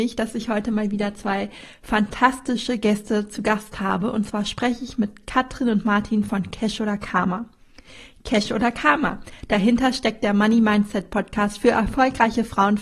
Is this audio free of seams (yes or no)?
yes